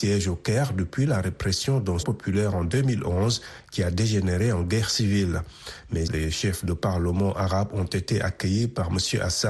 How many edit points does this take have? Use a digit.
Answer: 2